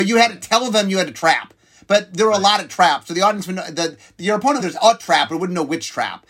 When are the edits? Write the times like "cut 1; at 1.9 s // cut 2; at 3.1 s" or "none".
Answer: cut 1; at 4.6 s